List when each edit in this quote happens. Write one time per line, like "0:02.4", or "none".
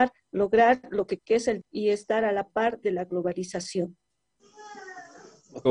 0:01.2
0:01.6

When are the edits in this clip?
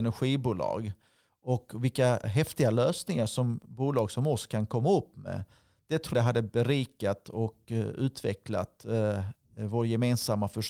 0:02.2
0:06.1

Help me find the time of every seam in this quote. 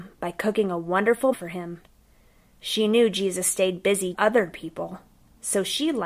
0:01.3
0:04.1

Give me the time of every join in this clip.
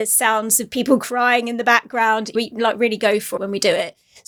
0:02.3
0:03.4

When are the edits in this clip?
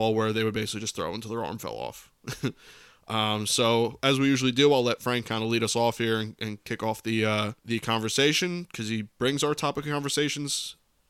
0:07.6

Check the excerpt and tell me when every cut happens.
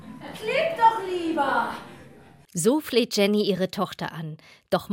none

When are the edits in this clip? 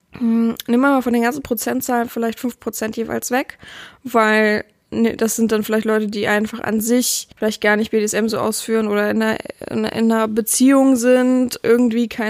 0:07.3

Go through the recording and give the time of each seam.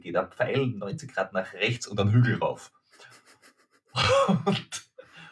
none

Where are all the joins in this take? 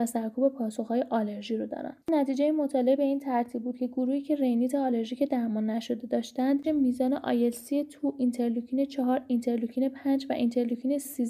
0:02.0
0:06.6

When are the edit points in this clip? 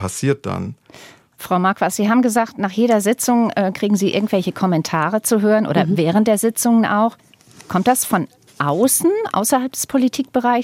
none

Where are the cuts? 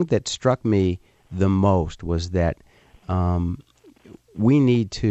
none

